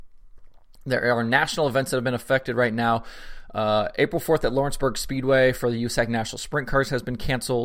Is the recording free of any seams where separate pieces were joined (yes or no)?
yes